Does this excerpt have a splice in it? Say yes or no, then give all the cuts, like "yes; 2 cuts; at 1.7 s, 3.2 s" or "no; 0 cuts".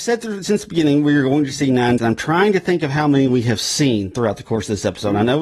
yes; 1 cut; at 2.0 s